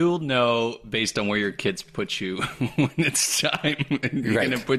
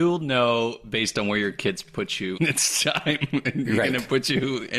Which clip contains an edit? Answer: second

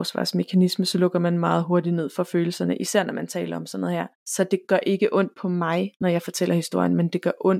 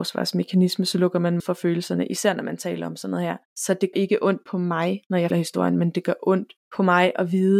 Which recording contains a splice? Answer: second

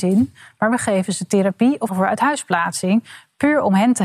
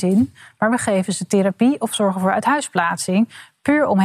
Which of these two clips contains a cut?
first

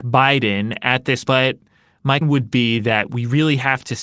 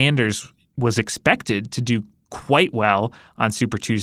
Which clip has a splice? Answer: first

